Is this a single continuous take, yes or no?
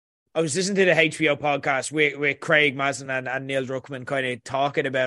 yes